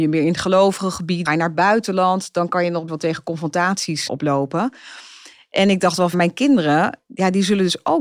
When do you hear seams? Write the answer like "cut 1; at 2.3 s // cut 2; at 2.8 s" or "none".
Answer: cut 1; at 1.2 s // cut 2; at 2.9 s // cut 3; at 4.1 s // cut 4; at 6.1 s